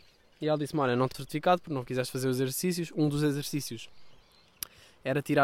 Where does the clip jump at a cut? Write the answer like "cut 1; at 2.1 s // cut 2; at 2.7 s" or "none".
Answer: cut 1; at 1.1 s

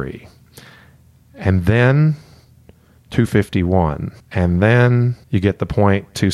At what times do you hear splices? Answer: cut 1; at 4.2 s // cut 2; at 5.2 s

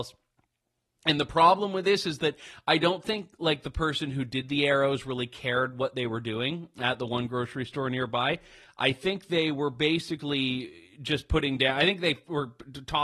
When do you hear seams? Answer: none

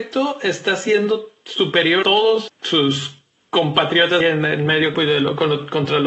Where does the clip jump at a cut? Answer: cut 1; at 2.0 s // cut 2; at 2.5 s // cut 3; at 4.2 s // cut 4; at 4.9 s

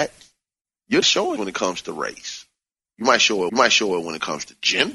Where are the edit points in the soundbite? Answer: cut 1; at 1.0 s // cut 2; at 1.4 s // cut 3; at 3.5 s

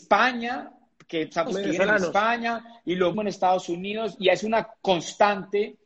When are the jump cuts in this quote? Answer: cut 1; at 1.5 s // cut 2; at 3.1 s // cut 3; at 4.2 s // cut 4; at 4.7 s

